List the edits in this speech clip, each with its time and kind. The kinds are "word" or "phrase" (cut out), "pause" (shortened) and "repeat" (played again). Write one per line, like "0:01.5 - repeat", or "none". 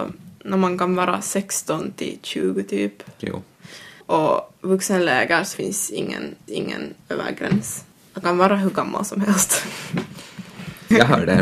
0:04.0 - pause
0:05.5 - word
0:06.5 - repeat
0:08.2 - word